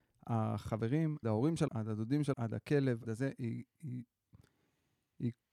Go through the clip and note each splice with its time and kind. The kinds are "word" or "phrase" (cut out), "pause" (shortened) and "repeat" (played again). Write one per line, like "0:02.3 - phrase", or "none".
0:01.2 - word
0:01.7 - word
0:02.3 - word
0:03.0 - word